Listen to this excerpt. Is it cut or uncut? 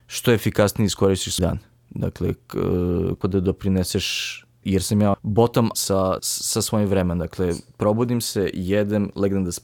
cut